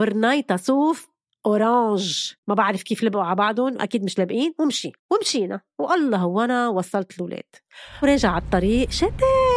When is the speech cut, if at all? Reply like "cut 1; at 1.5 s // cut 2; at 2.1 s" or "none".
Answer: cut 1; at 2.4 s // cut 2; at 5.0 s // cut 3; at 8.0 s